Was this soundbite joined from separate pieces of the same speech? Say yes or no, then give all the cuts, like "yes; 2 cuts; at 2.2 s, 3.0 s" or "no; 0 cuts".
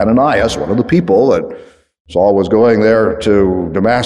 no; 0 cuts